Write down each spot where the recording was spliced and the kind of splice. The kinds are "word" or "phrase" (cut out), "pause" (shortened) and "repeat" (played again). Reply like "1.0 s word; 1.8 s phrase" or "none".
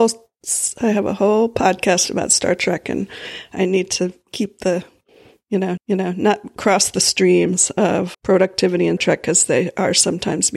5.8 s repeat; 8.1 s word; 9.0 s word